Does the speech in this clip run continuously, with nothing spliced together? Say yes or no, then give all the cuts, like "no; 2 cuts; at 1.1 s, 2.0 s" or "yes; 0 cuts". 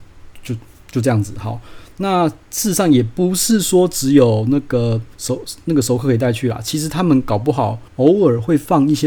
no; 2 cuts; at 5.1 s, 7.9 s